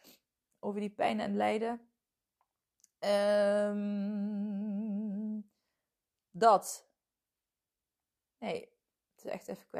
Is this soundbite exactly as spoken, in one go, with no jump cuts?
yes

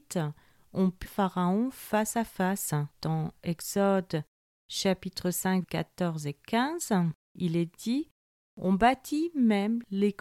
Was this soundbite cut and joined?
yes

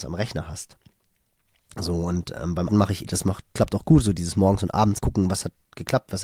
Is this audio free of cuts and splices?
no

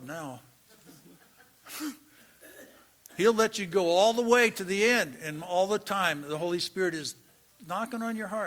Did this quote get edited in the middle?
no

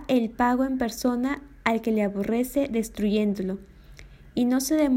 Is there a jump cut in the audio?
no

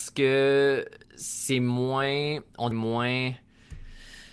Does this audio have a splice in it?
yes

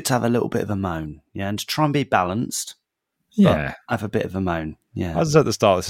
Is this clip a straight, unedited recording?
yes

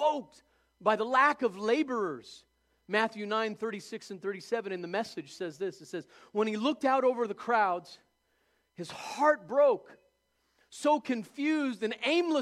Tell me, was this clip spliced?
no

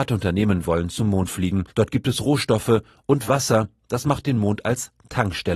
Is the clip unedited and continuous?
no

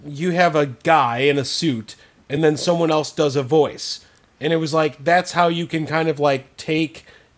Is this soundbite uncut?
yes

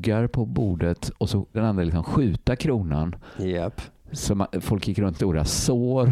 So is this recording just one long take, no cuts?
no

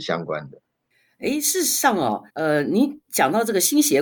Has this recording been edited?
yes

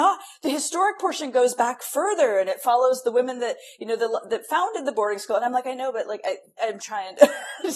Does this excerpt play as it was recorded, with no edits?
no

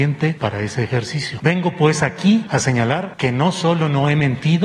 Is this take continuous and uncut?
yes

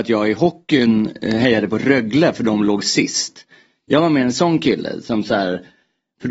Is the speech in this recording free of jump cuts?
yes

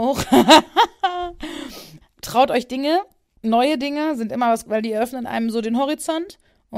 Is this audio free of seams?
no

